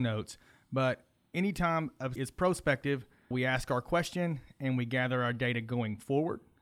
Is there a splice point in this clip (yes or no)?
yes